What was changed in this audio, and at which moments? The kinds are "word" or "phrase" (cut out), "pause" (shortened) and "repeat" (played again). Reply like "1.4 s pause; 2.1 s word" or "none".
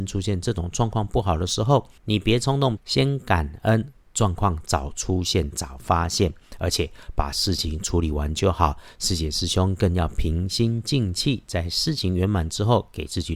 2.0 s pause; 2.8 s phrase

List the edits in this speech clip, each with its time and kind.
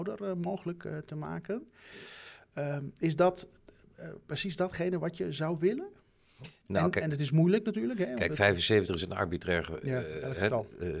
none

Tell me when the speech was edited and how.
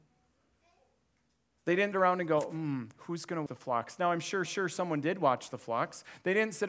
1.9 s word; 3.5 s word; 4.5 s repeat

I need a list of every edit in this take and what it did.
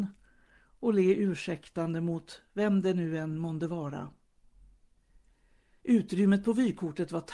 none

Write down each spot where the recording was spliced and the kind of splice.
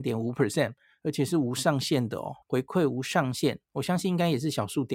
2.4 s word

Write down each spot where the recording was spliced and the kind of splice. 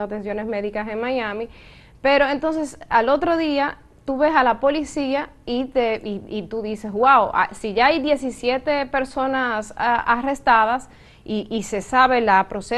none

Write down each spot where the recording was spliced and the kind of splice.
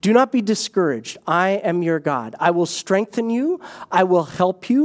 none

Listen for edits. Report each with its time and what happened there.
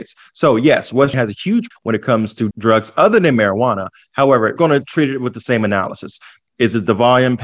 1.1 s word; 1.7 s word; 2.5 s word; 4.6 s word

